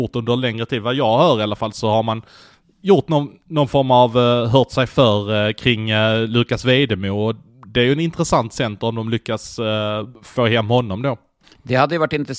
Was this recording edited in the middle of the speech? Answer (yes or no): no